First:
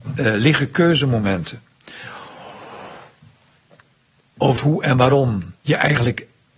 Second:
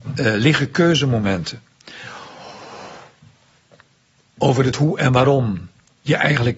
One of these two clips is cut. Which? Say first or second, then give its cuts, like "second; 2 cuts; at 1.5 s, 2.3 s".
first; 2 cuts; at 4.6 s, 5.6 s